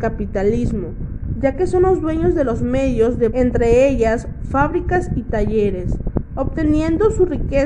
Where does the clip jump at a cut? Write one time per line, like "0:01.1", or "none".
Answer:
0:03.3

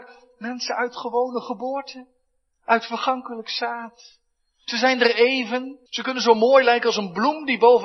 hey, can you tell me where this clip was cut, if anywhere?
0:05.9

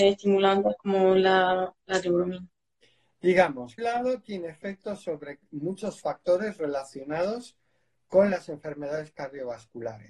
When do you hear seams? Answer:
0:03.8

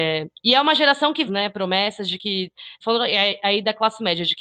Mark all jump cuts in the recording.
0:01.3
0:02.8

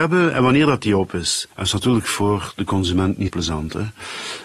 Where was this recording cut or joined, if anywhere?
0:01.5
0:03.3

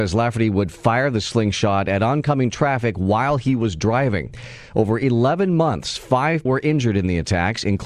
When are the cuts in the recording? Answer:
0:06.5

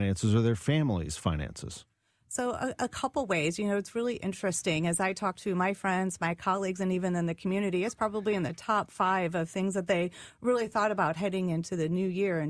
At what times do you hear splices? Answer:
none

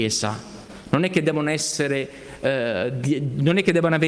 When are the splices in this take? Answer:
none

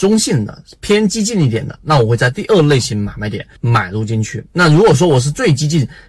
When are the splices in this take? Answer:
0:03.6
0:04.5

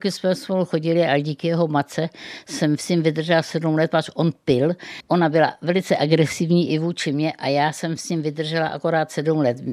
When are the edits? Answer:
none

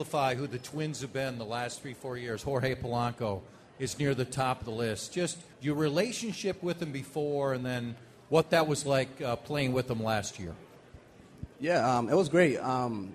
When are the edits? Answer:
0:05.5
0:11.5

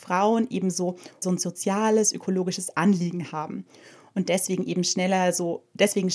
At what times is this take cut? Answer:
0:01.2

